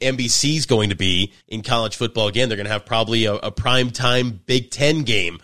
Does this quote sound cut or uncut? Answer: cut